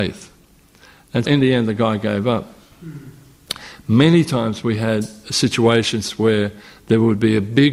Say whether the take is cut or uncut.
cut